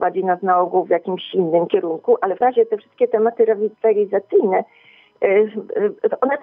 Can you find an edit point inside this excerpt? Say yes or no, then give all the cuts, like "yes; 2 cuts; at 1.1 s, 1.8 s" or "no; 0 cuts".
yes; 1 cut; at 2.4 s